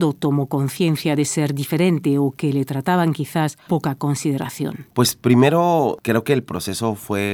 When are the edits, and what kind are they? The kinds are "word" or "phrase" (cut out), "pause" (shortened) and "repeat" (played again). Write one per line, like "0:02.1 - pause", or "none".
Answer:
0:03.7 - word